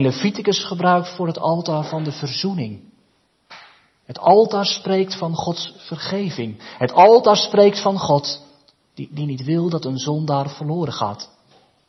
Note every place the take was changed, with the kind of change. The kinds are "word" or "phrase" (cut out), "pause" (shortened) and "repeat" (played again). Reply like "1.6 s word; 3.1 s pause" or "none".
none